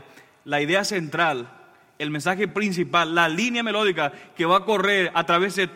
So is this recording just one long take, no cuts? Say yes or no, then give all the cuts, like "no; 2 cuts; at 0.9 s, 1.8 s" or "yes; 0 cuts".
yes; 0 cuts